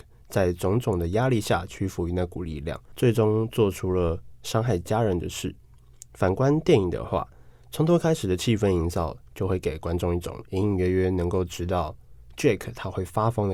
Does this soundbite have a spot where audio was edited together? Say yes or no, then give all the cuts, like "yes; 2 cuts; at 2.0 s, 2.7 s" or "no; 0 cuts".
no; 0 cuts